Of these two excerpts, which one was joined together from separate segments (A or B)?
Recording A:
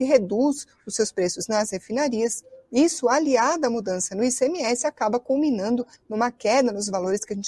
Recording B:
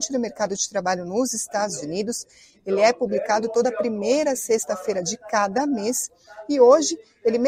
A